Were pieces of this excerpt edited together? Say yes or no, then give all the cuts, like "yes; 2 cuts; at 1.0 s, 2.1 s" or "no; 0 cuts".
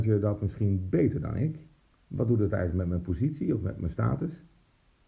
yes; 1 cut; at 1.8 s